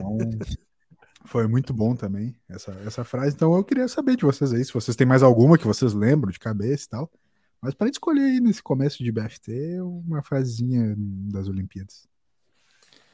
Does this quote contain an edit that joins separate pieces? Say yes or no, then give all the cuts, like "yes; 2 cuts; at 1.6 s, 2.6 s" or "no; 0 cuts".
no; 0 cuts